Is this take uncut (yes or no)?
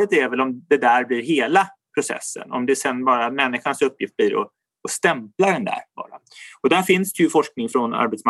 yes